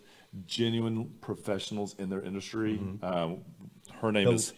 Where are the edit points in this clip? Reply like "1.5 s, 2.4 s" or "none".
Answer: none